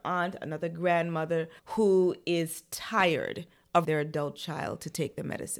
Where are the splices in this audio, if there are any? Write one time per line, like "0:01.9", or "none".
0:01.6
0:03.8

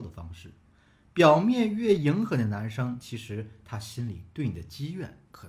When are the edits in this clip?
none

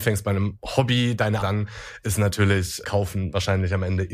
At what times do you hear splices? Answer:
0:01.4
0:02.8

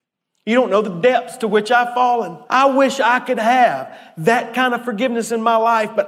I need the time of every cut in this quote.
0:02.5

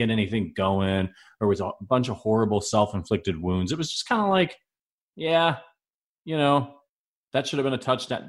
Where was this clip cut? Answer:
none

